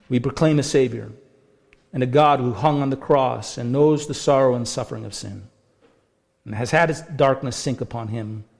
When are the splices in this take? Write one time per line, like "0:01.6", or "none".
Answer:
none